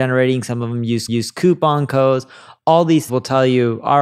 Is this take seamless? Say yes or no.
no